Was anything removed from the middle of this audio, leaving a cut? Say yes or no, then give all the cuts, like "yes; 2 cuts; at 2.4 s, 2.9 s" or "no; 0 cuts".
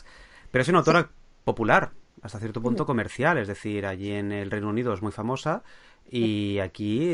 no; 0 cuts